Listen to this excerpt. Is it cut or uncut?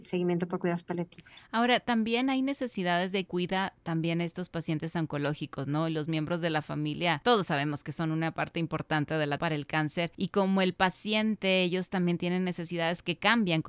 cut